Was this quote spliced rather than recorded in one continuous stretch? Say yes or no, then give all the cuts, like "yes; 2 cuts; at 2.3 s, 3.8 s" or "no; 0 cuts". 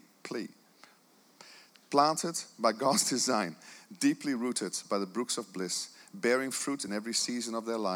no; 0 cuts